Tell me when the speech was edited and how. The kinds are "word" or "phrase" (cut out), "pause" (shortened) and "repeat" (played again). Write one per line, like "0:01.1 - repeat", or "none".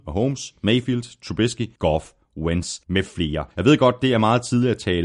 0:01.8 - pause
0:02.8 - pause
0:03.5 - pause